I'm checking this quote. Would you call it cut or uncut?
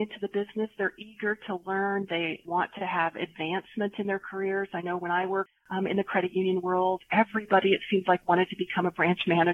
uncut